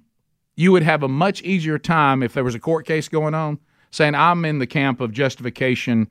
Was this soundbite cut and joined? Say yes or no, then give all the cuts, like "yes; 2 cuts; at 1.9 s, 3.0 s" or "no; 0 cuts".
no; 0 cuts